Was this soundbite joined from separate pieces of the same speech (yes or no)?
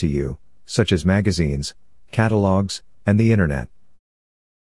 no